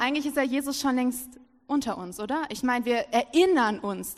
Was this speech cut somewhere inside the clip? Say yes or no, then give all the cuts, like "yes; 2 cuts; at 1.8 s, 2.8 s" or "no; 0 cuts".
no; 0 cuts